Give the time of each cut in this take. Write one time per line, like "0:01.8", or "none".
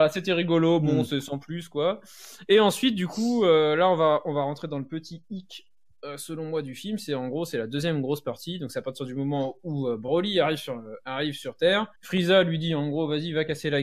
0:11.9